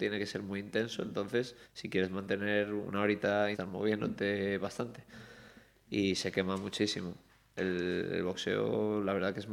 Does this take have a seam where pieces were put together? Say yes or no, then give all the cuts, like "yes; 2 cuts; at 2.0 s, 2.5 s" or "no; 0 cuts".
yes; 2 cuts; at 1.6 s, 3.5 s